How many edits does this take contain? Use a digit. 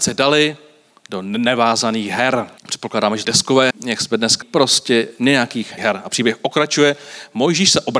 5